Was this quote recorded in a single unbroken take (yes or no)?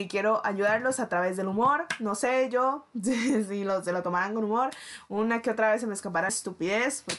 no